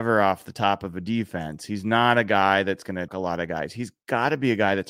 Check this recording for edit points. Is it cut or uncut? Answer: cut